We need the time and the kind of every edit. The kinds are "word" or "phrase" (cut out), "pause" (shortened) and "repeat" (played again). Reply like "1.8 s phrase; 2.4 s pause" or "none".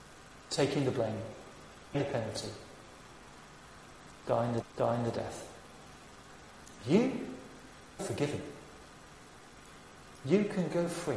1.9 s word; 4.6 s repeat; 8.0 s word